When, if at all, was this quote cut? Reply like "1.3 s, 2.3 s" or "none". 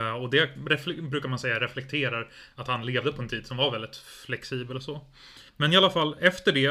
5.5 s